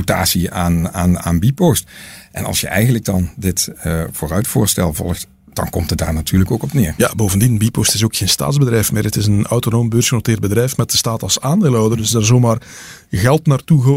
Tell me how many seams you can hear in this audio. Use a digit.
0